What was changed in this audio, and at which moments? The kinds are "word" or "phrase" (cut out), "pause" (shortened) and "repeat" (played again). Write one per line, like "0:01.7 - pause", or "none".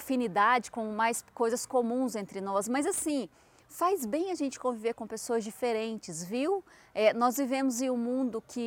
none